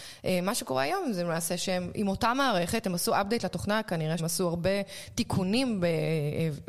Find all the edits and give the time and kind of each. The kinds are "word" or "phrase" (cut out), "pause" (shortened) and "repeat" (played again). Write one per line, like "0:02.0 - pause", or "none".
0:04.2 - word